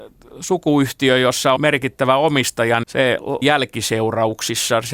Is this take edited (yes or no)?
yes